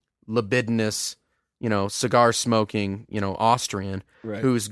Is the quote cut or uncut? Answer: uncut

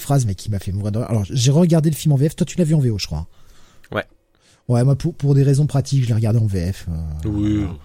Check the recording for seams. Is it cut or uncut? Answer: uncut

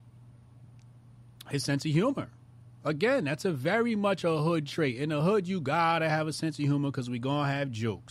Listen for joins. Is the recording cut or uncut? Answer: uncut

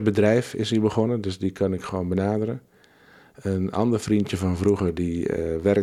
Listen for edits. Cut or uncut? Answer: uncut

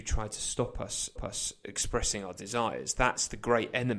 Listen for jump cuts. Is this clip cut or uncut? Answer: cut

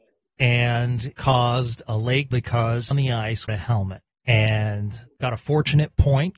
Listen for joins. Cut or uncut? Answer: cut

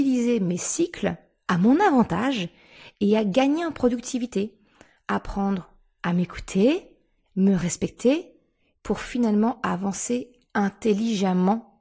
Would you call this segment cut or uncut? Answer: uncut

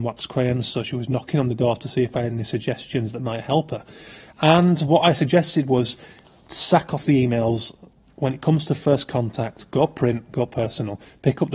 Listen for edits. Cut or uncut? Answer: uncut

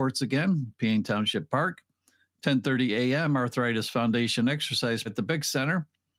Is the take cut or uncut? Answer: cut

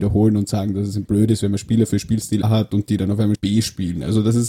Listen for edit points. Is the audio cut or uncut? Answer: cut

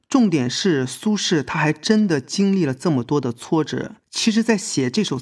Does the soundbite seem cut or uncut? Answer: cut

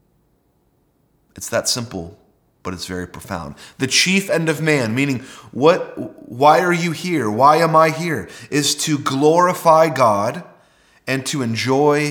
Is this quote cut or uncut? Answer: uncut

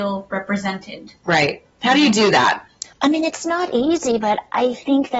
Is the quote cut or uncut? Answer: cut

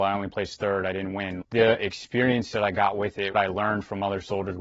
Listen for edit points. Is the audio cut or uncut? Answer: cut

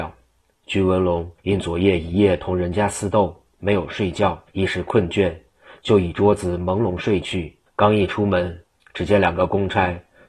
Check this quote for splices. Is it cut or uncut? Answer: cut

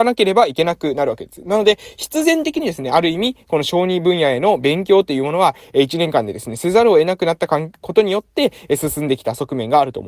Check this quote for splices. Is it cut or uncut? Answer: uncut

